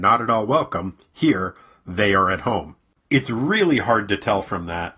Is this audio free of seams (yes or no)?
yes